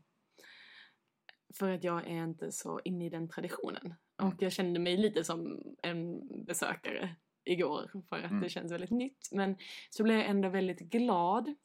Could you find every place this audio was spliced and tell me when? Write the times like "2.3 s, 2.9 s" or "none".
none